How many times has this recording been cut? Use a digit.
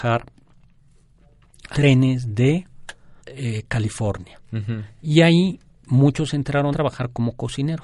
3